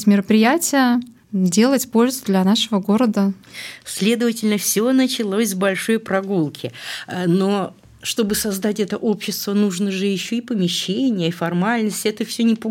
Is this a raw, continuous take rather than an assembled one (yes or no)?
yes